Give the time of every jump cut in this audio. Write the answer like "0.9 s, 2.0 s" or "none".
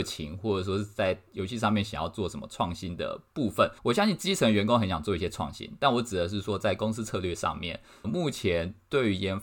3.8 s, 8.0 s